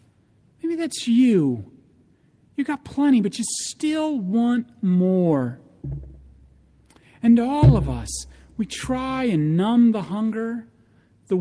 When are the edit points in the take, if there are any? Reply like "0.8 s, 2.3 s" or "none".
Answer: none